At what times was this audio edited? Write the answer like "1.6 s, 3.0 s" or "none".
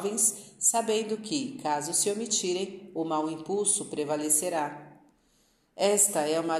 none